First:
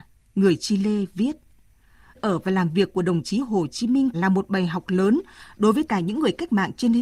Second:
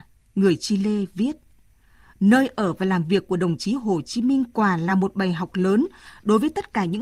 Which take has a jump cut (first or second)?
first